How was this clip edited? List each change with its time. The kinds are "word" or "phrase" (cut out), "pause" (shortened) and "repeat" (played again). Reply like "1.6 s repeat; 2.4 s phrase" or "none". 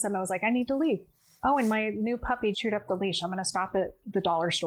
2.5 s word